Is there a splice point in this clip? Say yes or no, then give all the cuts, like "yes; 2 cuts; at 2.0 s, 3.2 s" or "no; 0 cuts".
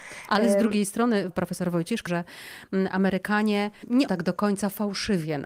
yes; 3 cuts; at 1.3 s, 2.1 s, 4.1 s